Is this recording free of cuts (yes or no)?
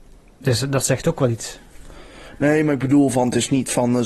yes